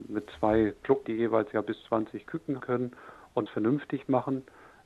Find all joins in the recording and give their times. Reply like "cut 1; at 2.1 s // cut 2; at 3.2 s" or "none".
cut 1; at 1.0 s // cut 2; at 1.8 s // cut 3; at 2.6 s // cut 4; at 3.5 s